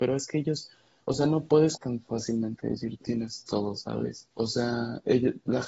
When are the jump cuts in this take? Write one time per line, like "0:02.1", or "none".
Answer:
0:01.7
0:03.0
0:04.3